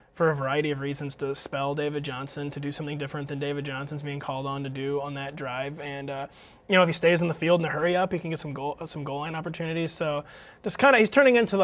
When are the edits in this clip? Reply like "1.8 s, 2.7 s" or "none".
none